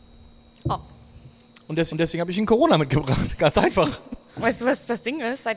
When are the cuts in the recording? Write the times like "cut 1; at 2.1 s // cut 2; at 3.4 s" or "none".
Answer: cut 1; at 1.9 s